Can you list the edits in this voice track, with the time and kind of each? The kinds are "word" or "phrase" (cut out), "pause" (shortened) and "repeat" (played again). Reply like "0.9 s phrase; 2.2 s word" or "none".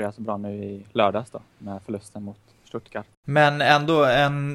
3.1 s pause